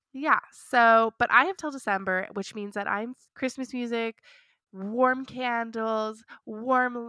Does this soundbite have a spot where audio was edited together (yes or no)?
yes